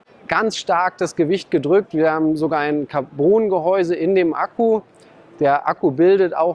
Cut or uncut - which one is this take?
uncut